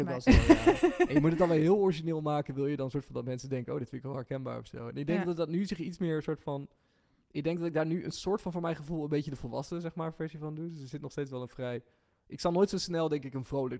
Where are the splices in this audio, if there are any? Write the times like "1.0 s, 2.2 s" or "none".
none